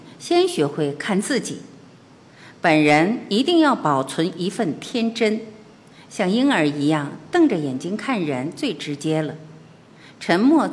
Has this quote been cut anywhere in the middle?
no; 0 cuts

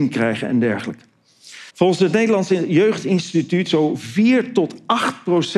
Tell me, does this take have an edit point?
yes; 2 cuts; at 1.7 s, 3.7 s

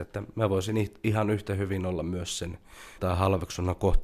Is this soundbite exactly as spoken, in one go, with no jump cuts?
no; 1 cut; at 3.0 s

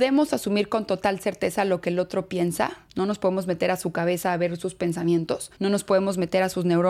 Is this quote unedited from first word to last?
no; 2 cuts; at 2.9 s, 5.6 s

